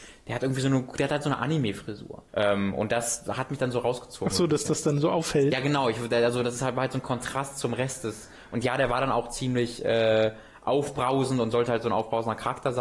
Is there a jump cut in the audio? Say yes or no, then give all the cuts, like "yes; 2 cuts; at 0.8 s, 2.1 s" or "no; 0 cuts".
yes; 1 cut; at 2.3 s